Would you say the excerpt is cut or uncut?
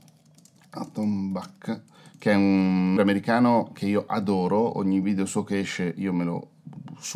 cut